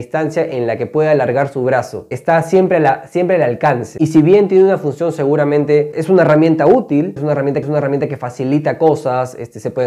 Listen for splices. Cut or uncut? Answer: cut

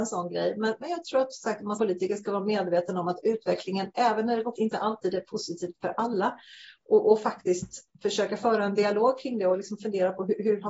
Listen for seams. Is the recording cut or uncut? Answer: cut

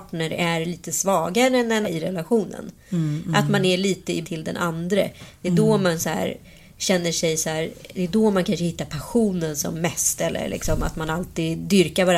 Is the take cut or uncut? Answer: cut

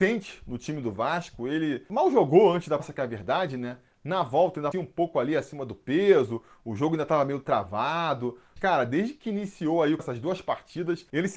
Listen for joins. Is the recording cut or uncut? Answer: cut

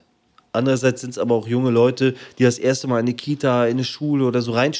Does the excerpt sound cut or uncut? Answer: uncut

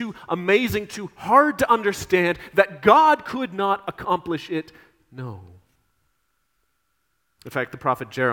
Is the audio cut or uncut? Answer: uncut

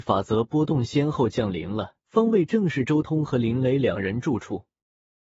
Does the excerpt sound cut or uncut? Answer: cut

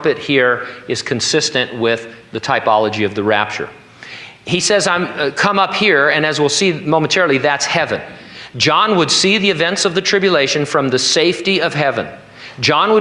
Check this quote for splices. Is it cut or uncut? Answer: uncut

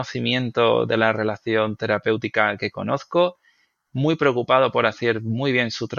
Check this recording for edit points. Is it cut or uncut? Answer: uncut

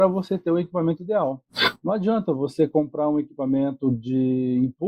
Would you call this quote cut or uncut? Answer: uncut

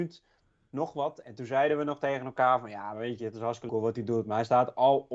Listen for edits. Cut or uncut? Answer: cut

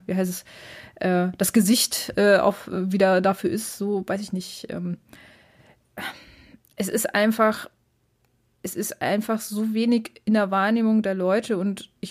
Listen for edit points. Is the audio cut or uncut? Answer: uncut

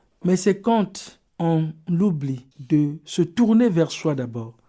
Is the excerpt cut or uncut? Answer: cut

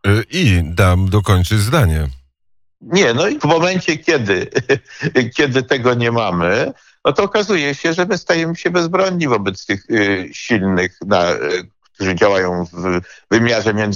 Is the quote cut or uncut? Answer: cut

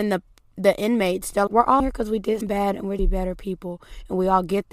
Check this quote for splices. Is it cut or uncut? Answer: cut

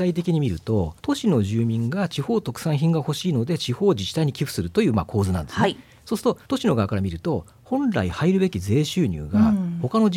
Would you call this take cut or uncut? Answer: cut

